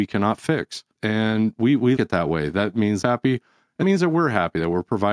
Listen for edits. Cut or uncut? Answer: cut